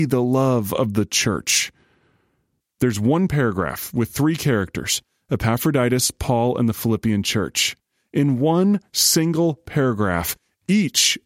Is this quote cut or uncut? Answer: uncut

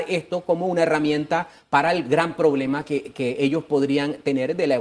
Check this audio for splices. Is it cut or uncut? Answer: uncut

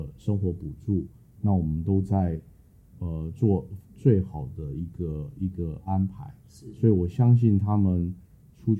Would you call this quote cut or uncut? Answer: uncut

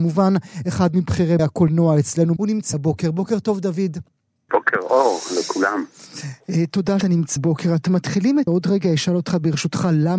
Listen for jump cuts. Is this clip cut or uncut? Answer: cut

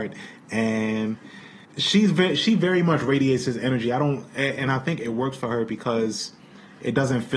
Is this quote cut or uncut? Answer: cut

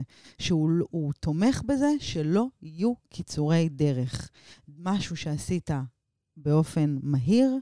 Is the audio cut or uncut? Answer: uncut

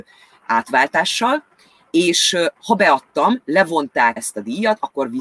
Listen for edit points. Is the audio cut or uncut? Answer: cut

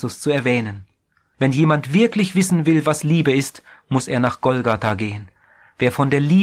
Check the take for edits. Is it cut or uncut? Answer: uncut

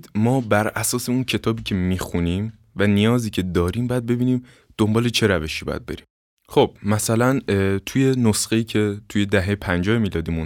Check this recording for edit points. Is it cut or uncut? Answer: uncut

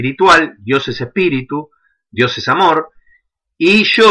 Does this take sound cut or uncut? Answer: uncut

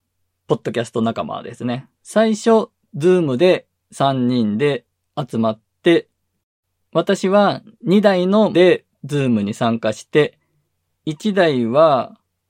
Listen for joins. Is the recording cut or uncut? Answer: cut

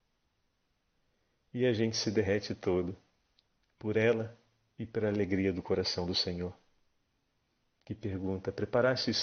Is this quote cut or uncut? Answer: uncut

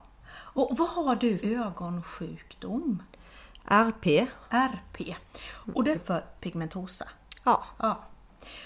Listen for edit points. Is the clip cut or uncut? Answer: cut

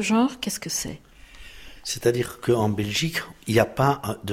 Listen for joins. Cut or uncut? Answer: uncut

